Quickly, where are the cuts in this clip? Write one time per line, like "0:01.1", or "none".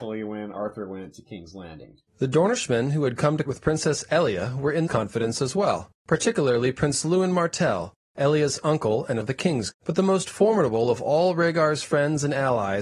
0:02.1
0:03.4
0:04.9
0:06.0
0:09.2
0:09.7